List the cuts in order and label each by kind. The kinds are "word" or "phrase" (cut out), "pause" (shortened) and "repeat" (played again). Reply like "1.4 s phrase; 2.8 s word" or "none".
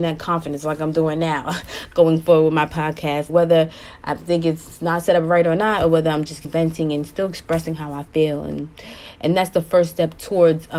3.3 s word; 6.4 s word